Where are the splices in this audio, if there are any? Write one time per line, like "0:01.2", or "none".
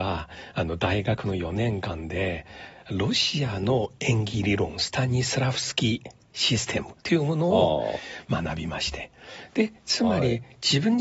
0:07.0